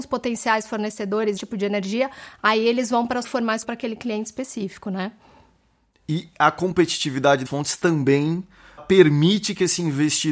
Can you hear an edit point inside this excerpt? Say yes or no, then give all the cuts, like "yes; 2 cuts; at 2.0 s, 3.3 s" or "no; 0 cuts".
yes; 5 cuts; at 1.4 s, 3.2 s, 3.6 s, 7.5 s, 8.8 s